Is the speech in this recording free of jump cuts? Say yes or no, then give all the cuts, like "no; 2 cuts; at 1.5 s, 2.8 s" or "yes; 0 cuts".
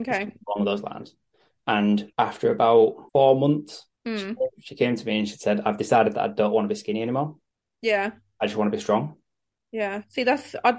no; 5 cuts; at 2.1 s, 3.1 s, 3.9 s, 4.5 s, 7.5 s